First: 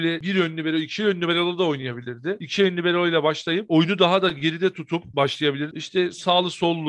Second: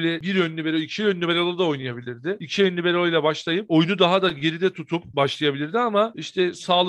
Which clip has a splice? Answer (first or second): first